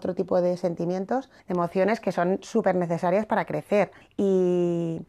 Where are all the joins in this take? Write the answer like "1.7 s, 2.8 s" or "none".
1.4 s, 4.0 s